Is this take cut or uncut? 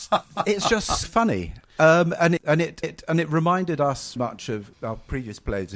cut